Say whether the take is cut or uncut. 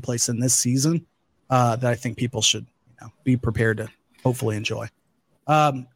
uncut